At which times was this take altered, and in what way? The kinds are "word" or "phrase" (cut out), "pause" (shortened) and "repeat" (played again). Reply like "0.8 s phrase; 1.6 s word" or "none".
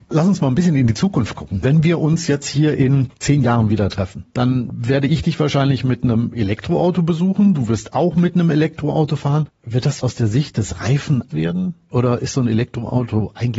10.0 s phrase; 11.3 s word